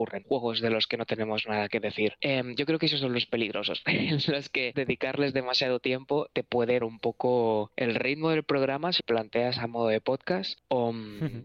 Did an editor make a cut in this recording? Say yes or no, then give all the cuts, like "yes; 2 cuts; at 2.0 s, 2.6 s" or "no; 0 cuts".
yes; 3 cuts; at 4.7 s, 6.8 s, 9.0 s